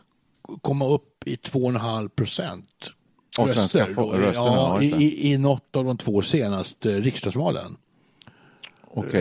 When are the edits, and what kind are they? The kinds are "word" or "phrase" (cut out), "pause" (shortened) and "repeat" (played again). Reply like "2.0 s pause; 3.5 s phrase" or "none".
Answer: 3.4 s word